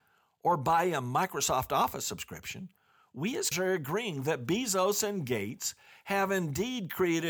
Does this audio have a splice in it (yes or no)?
yes